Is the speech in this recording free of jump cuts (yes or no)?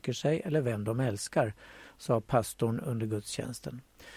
yes